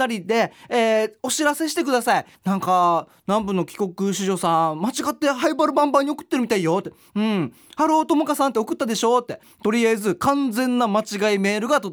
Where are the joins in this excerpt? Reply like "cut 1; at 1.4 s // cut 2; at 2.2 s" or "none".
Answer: cut 1; at 2.3 s